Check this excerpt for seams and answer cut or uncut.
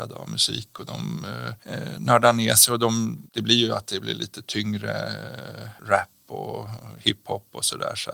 cut